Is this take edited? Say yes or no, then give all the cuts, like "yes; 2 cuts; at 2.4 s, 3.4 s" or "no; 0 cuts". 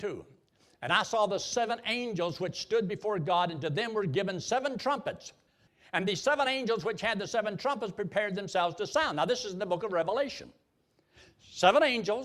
no; 0 cuts